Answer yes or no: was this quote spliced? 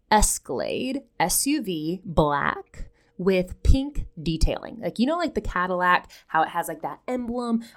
no